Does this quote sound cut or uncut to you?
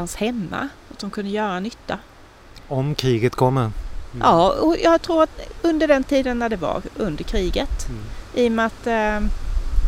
uncut